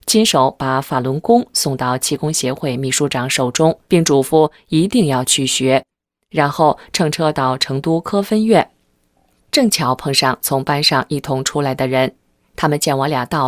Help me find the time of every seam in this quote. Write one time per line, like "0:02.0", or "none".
0:03.9

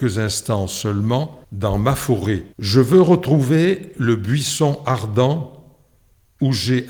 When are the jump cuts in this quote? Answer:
0:01.4
0:02.5

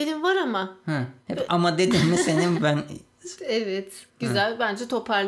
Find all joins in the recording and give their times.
0:01.2
0:02.6
0:04.1

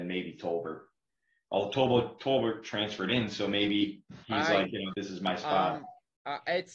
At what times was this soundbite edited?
0:04.2
0:04.9

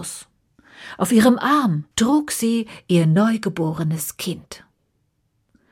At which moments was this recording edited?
0:01.9

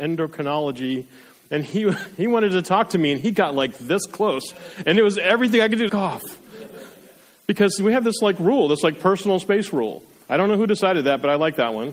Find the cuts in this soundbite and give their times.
0:05.9

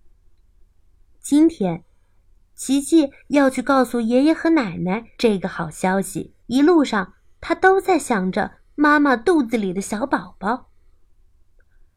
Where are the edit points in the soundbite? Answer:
0:05.1
0:06.4

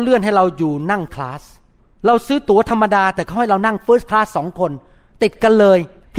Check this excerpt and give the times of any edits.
0:01.1

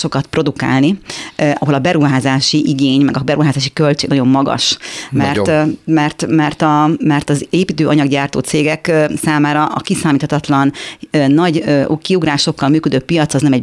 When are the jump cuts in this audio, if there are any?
none

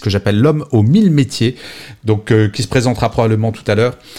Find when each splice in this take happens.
none

